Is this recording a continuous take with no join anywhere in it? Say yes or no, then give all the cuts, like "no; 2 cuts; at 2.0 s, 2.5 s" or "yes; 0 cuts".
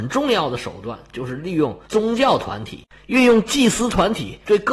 yes; 0 cuts